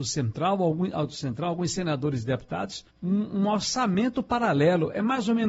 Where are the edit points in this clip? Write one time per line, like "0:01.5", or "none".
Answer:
0:02.9

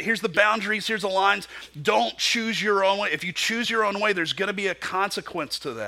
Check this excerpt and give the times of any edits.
none

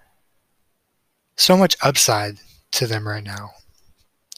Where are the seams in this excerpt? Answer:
none

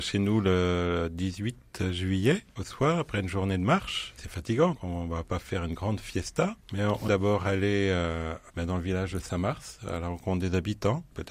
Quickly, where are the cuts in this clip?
0:04.7
0:07.1

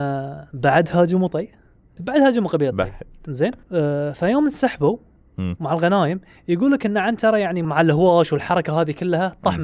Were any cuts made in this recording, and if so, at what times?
0:02.0
0:03.6
0:07.6

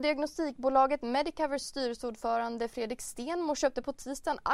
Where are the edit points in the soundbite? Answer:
none

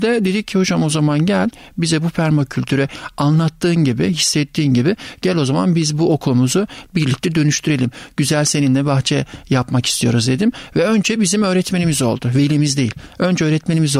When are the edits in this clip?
none

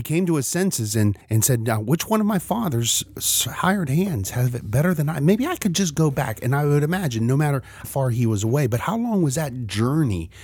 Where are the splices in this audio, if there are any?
0:01.2
0:07.8

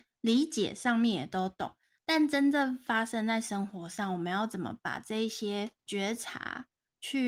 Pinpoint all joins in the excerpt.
0:05.8

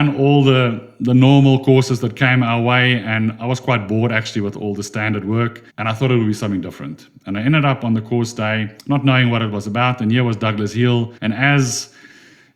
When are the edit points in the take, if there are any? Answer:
0:05.7
0:08.8
0:11.2

